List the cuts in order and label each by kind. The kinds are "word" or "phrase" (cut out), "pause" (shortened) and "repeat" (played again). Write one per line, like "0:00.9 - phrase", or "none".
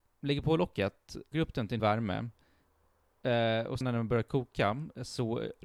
0:01.3 - word
0:01.8 - word
0:03.8 - word